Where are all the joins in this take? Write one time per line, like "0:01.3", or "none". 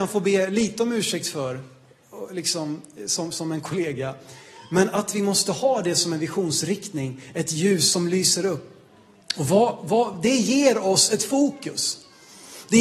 none